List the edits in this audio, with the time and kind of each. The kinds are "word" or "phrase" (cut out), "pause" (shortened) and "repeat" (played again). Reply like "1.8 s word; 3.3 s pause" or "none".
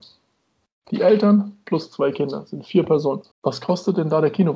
3.3 s pause